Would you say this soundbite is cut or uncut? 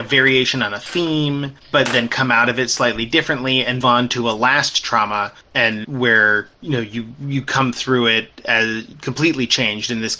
cut